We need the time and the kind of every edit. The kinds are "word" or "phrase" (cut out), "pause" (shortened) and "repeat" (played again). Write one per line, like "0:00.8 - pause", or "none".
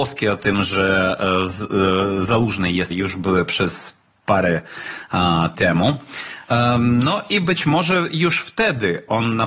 0:02.9 - word
0:05.5 - word